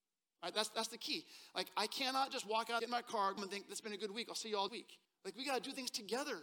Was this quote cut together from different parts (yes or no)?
yes